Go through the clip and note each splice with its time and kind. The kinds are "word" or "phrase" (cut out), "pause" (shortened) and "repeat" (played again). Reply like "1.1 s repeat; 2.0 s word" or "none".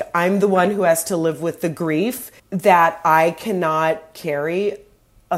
2.4 s pause

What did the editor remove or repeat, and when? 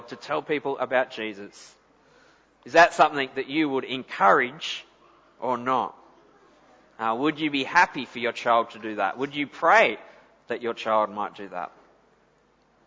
none

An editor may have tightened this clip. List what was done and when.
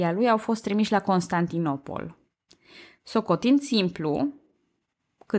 none

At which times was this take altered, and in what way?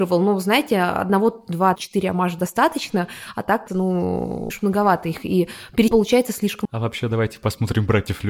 1.8 s word; 3.7 s word; 4.5 s word; 5.9 s word; 6.6 s word

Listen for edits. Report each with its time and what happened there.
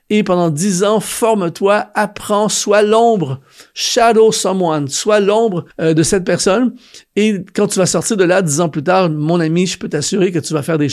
5.7 s pause

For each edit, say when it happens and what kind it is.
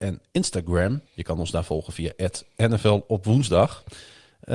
1.1 s pause

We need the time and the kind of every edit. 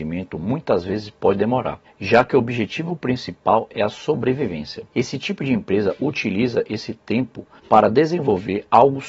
1.8 s pause; 4.9 s pause; 7.6 s pause

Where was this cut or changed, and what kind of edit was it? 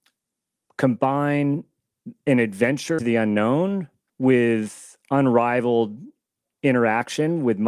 3.0 s word; 4.1 s pause

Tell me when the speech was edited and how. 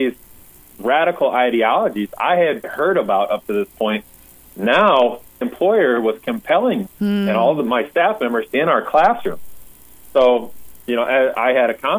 2.6 s word; 5.4 s word; 6.9 s word; 8.5 s phrase

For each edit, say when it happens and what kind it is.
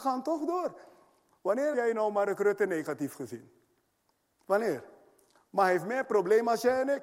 1.7 s word; 3.9 s pause

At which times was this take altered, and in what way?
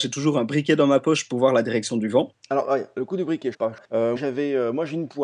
3.5 s phrase; 4.2 s word

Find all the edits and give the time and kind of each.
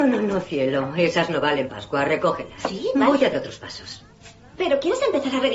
1.7 s word; 3.3 s word

